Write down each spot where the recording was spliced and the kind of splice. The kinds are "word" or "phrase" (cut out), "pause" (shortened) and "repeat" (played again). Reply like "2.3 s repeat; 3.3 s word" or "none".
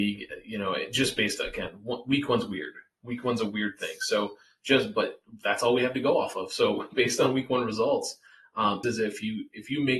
8.8 s phrase